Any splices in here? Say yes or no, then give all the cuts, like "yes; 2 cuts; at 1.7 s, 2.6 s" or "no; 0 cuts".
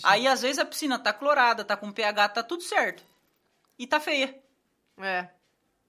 no; 0 cuts